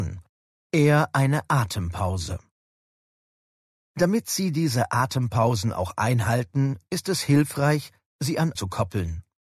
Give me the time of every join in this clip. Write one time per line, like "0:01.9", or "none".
0:08.6